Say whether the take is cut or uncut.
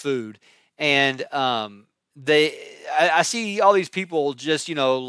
uncut